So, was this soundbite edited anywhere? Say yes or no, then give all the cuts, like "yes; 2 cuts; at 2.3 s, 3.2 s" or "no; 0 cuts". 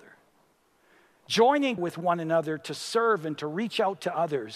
yes; 1 cut; at 1.8 s